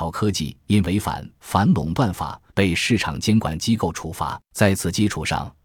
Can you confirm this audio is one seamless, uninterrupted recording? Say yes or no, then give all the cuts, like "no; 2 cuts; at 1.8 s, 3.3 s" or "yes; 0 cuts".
no; 2 cuts; at 2.5 s, 4.4 s